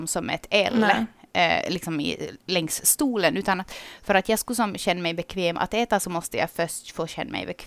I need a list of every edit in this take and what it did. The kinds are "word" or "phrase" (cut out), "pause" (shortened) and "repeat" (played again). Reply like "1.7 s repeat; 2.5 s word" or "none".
none